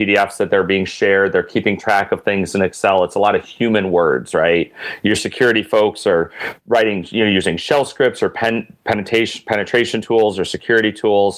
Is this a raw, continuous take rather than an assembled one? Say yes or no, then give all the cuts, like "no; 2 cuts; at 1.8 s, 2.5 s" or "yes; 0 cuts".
yes; 0 cuts